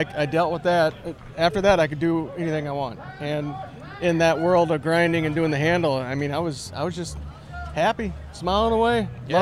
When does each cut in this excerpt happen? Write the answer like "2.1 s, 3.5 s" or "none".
none